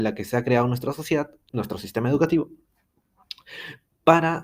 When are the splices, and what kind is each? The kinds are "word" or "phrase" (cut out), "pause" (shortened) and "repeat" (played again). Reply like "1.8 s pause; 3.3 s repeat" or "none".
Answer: 1.5 s word

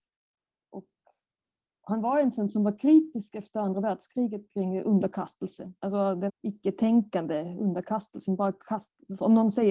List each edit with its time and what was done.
5.8 s pause; 6.3 s word

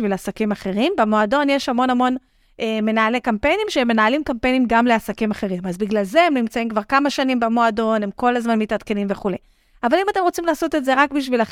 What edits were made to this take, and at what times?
none

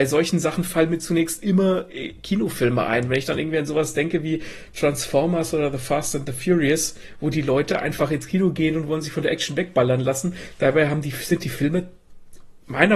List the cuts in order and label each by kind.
none

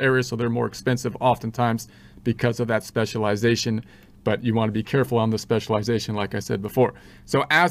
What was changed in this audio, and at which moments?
none

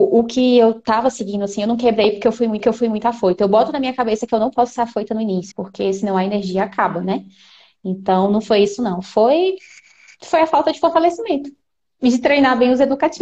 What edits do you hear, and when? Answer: 2.6 s repeat; 5.5 s word

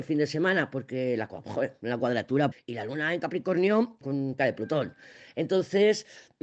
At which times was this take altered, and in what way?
2.5 s word; 4.0 s word; 4.4 s word

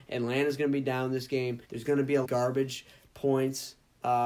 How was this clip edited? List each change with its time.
1.6 s pause; 2.2 s phrase

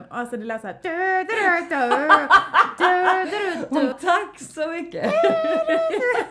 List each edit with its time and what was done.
3.9 s word

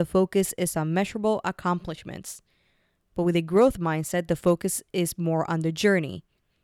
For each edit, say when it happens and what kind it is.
none

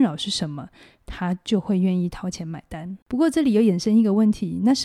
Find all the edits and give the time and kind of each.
3.0 s pause

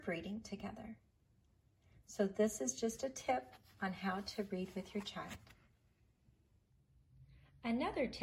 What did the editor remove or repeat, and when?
none

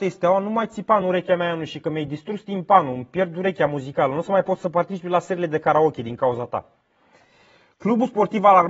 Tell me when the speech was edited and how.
none

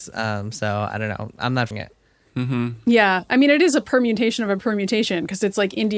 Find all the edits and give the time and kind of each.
1.7 s word

